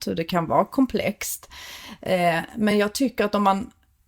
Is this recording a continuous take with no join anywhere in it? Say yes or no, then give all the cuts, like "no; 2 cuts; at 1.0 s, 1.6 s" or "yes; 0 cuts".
yes; 0 cuts